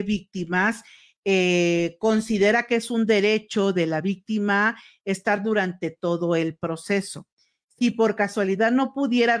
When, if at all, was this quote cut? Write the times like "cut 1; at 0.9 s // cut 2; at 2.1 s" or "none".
none